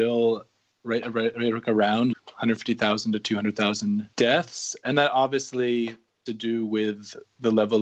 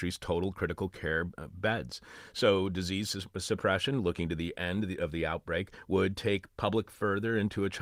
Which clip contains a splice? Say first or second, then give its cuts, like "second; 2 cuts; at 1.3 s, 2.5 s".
first; 3 cuts; at 2.1 s, 4.1 s, 6.3 s